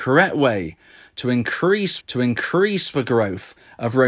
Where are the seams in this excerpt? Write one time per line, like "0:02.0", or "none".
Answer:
0:02.0